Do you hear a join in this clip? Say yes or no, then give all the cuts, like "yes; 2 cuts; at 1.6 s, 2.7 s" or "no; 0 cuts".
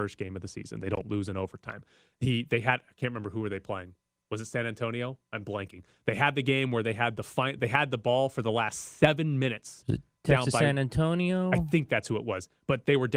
no; 0 cuts